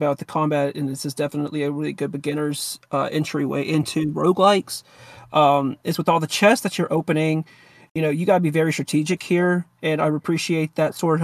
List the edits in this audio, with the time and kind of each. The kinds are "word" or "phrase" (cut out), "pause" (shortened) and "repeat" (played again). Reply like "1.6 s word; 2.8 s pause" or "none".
none